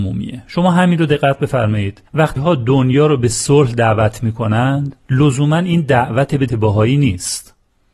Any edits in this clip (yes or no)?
yes